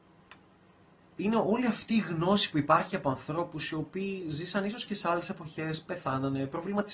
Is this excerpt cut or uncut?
uncut